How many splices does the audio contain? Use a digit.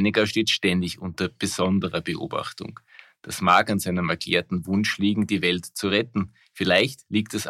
0